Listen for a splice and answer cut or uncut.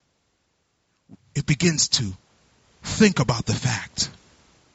uncut